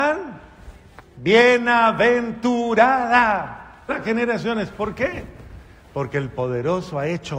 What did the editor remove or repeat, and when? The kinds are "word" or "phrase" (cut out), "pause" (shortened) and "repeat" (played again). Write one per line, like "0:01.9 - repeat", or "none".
0:03.9 - word